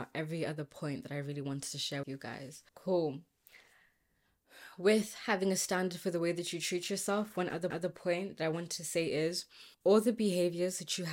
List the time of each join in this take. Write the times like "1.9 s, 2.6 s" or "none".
2.0 s, 2.7 s, 7.7 s, 9.7 s